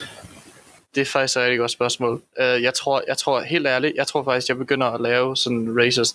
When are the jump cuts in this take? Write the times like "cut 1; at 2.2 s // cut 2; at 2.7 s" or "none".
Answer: none